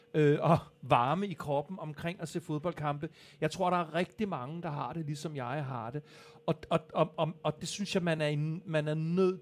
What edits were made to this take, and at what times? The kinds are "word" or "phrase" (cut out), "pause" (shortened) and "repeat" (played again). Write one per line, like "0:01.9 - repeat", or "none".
none